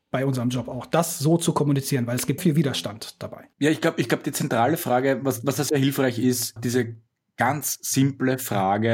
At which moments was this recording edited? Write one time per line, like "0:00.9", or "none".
0:02.4
0:06.6

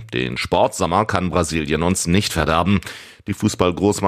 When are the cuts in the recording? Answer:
none

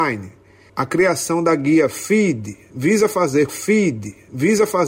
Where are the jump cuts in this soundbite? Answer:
0:03.5

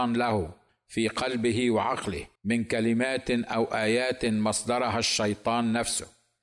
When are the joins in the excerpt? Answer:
0:02.4

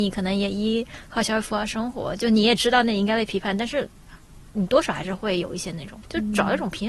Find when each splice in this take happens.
none

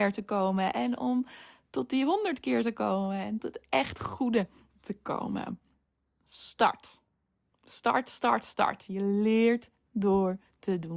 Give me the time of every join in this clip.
0:03.4

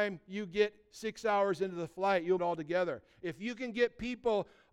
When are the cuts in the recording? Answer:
0:02.4

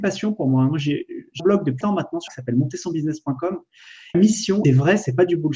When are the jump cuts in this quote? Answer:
0:01.4
0:01.8
0:02.3
0:04.1
0:04.6

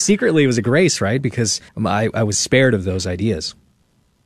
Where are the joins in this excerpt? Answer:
0:01.7

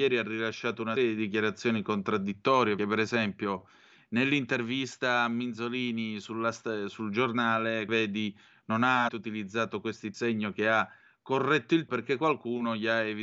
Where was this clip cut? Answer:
0:01.0
0:02.8
0:07.9
0:09.1
0:10.1
0:11.9

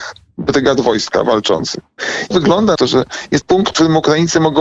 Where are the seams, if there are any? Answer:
0:02.3
0:02.8
0:03.4

